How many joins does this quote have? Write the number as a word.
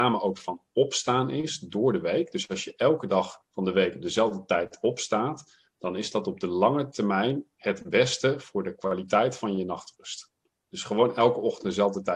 one